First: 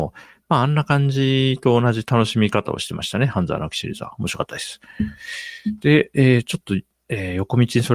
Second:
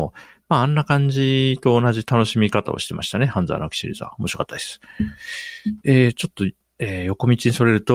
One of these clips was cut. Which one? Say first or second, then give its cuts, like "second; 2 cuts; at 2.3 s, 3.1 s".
second; 1 cut; at 5.8 s